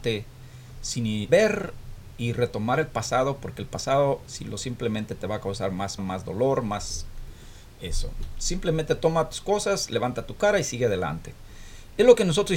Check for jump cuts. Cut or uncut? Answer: cut